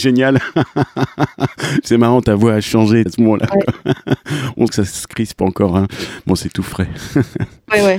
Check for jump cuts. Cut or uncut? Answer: cut